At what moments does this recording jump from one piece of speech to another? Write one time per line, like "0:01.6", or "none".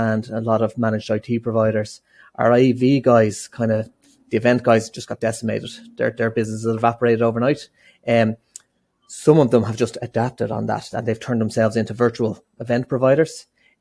none